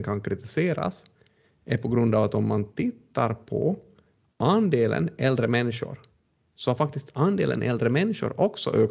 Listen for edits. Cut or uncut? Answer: uncut